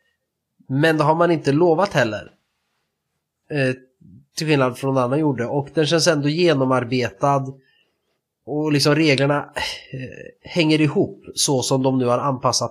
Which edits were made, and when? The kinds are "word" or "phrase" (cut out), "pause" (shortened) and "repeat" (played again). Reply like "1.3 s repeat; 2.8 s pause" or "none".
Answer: none